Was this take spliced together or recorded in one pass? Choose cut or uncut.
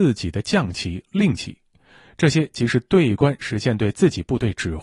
uncut